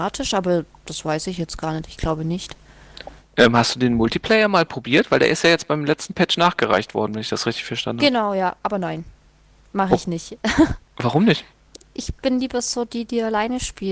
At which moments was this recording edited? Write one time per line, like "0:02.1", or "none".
none